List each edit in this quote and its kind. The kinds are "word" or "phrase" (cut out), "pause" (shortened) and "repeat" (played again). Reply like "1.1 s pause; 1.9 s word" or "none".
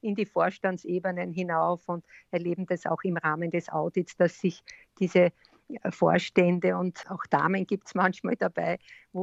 none